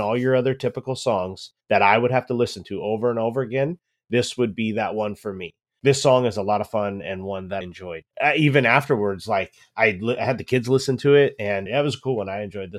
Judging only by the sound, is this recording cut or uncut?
cut